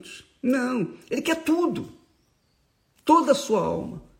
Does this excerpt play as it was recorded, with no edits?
yes; 0 cuts

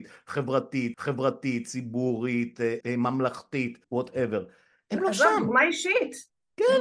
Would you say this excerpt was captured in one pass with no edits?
no; 3 cuts; at 0.9 s, 2.8 s, 3.8 s

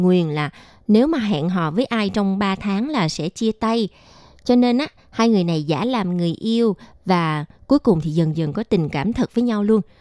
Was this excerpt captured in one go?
yes; 0 cuts

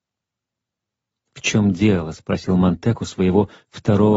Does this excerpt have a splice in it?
no; 0 cuts

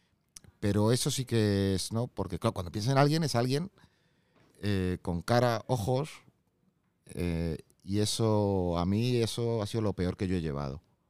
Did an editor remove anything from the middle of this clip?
no; 0 cuts

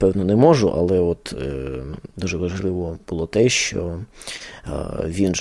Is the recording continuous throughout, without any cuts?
yes; 0 cuts

